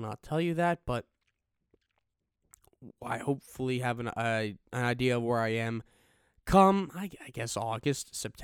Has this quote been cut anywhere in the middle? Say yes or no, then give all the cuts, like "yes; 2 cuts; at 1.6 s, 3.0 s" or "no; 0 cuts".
no; 0 cuts